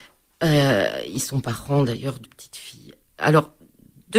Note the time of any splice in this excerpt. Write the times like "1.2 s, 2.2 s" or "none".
2.2 s